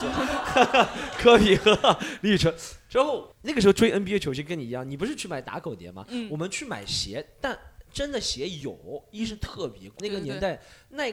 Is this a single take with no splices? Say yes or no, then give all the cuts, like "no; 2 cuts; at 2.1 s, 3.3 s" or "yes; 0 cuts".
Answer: no; 2 cuts; at 3.3 s, 10.0 s